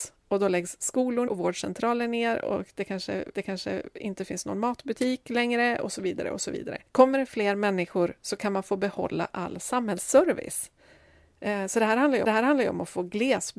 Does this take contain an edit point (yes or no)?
yes